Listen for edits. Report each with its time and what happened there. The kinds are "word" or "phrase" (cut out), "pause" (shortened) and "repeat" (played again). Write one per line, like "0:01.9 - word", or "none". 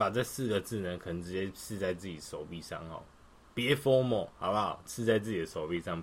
none